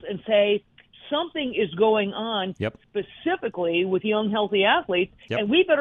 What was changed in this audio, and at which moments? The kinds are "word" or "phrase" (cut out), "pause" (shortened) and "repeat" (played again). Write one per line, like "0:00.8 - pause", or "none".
none